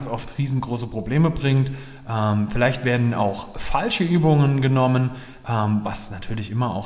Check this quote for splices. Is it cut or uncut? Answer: uncut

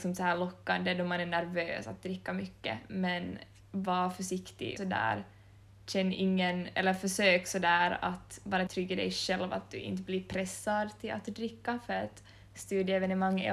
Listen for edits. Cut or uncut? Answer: cut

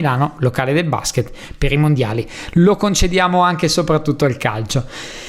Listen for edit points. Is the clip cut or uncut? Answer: uncut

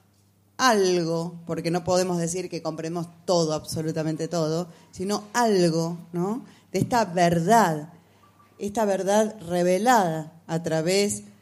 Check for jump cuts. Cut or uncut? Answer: uncut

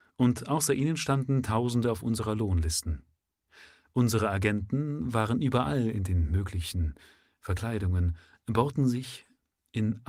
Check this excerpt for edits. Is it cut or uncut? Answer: uncut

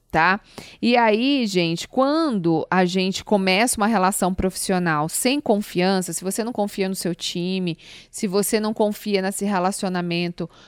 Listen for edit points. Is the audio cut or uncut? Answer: uncut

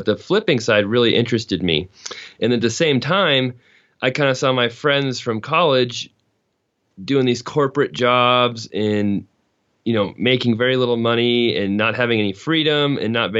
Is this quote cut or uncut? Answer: uncut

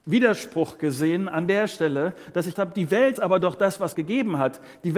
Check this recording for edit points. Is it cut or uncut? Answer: cut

